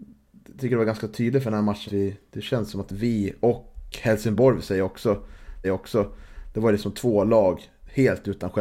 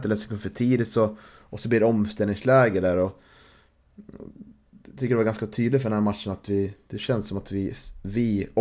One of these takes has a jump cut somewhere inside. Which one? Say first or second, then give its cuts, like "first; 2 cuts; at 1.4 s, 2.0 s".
first; 3 cuts; at 1.9 s, 2.9 s, 5.6 s